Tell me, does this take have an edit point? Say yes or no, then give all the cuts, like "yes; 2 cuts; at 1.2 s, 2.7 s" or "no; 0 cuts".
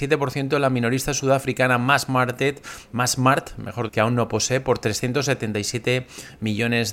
yes; 1 cut; at 3.9 s